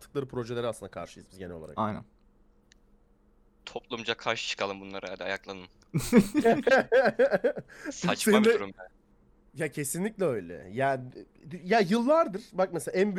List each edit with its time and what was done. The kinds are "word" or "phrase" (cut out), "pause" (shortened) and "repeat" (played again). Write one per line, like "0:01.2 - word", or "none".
none